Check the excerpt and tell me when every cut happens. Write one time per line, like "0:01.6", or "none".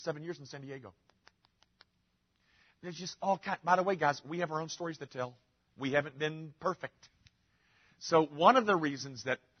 none